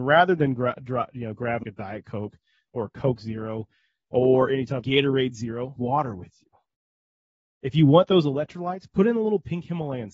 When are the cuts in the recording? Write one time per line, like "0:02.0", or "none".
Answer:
0:01.6
0:04.8
0:05.8